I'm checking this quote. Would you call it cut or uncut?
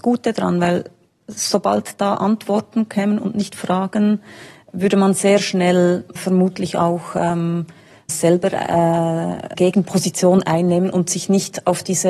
cut